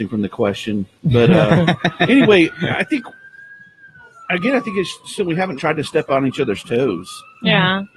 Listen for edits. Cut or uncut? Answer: cut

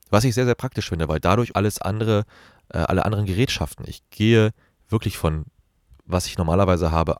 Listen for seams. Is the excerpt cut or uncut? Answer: cut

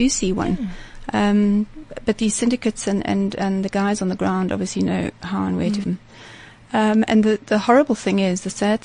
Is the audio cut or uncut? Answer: cut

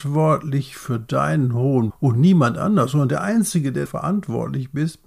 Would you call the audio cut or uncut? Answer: cut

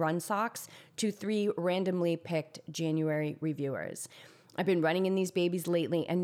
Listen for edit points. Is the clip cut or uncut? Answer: uncut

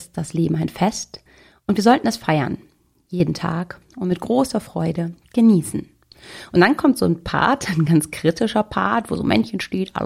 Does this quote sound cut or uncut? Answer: uncut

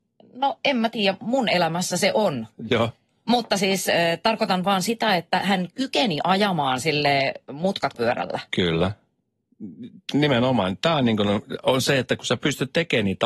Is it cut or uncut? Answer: cut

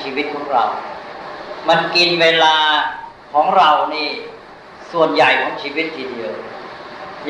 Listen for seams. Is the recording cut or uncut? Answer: cut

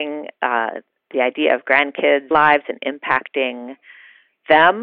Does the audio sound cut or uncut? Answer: cut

